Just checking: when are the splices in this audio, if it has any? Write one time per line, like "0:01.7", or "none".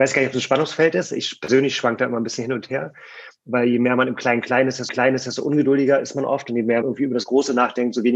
0:04.9
0:06.8